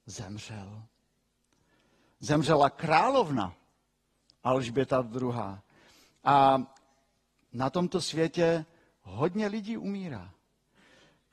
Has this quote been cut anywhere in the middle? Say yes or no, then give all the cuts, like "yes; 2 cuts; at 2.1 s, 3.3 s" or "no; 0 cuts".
no; 0 cuts